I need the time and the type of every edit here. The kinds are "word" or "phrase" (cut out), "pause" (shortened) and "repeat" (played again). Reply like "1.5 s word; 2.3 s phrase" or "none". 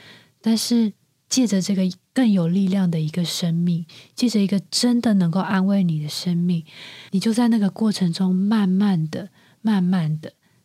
none